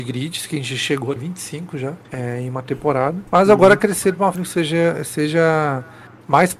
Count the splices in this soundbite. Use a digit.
4